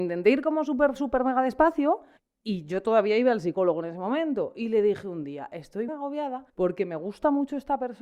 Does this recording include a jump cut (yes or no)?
yes